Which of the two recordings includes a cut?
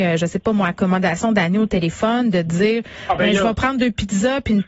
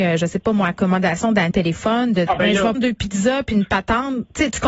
second; 3 cuts; at 1.5 s, 2.3 s, 2.7 s

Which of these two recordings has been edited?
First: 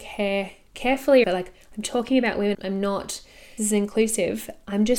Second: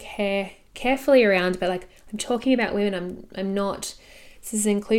first; 3 cuts; at 1.2 s, 2.5 s, 3.6 s

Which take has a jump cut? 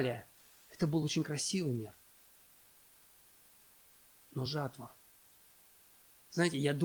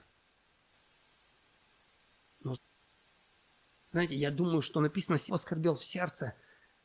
second; 2 cuts; at 2.5 s, 5.3 s

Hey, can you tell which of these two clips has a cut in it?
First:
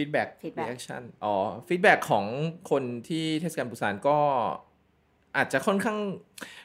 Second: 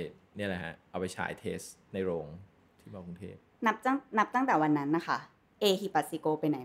second; 1 cut; at 3.5 s

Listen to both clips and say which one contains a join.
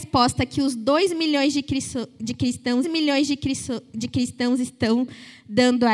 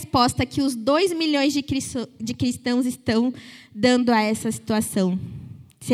first; 1 cut; at 2.8 s

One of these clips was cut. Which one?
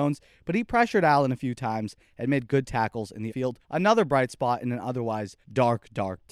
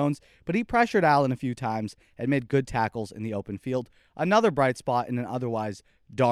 first; 3 cuts; at 3.3 s, 3.6 s, 5.4 s

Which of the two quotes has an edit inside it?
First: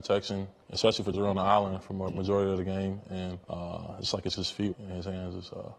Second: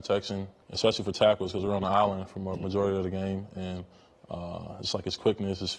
first; 4 cuts; at 1.1 s, 3.4 s, 4.3 s, 4.7 s

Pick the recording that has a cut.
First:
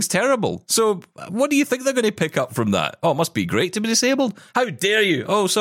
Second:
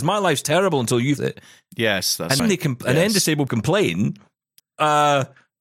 second; 4 cuts; at 1.2 s, 2.4 s, 3.5 s, 4.6 s

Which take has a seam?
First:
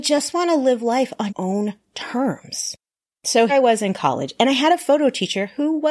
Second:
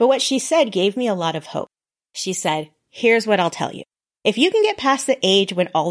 first; 2 cuts; at 1.3 s, 3.5 s

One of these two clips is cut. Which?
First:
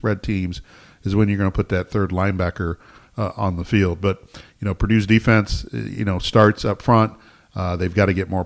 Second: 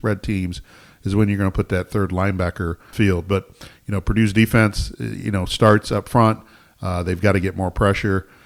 second; 1 cut; at 2.9 s

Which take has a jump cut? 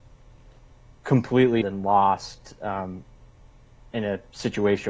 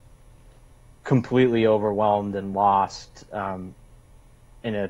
first; 1 cut; at 1.6 s

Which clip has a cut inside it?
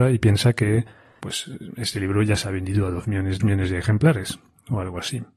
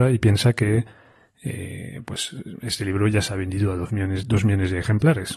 first; 2 cuts; at 1.2 s, 3.4 s

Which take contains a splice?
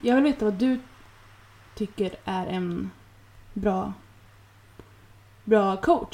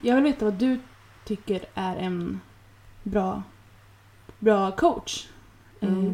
second; 2 cuts; at 0.9 s, 4.4 s

